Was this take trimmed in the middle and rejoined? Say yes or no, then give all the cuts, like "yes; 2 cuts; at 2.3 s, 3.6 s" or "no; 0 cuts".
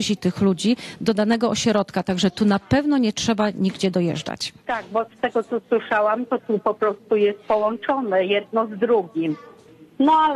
yes; 1 cut; at 4.6 s